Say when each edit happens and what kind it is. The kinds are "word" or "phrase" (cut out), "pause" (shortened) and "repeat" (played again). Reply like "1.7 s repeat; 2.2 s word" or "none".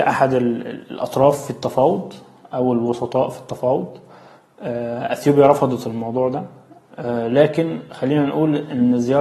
none